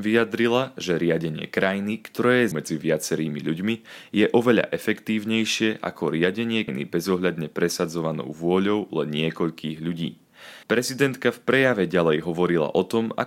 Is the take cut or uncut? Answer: cut